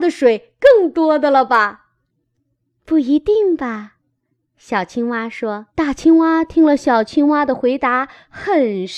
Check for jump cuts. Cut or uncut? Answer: cut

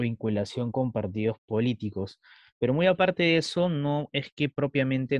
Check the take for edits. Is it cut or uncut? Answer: uncut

